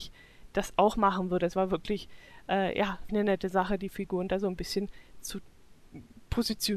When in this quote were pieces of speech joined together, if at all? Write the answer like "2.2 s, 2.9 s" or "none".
3.1 s